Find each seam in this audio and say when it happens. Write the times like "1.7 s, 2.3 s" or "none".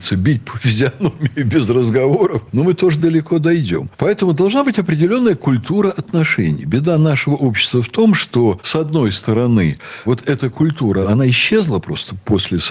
none